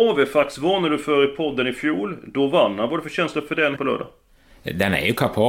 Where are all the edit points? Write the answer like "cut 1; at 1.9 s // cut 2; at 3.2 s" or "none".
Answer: cut 1; at 3.8 s